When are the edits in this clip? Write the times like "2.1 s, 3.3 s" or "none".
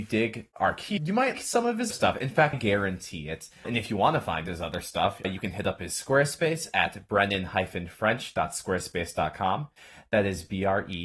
1.0 s, 1.3 s, 1.9 s, 2.5 s, 3.6 s, 5.2 s